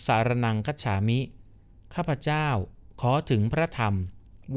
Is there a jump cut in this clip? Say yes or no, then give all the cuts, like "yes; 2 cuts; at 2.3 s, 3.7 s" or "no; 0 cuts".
no; 0 cuts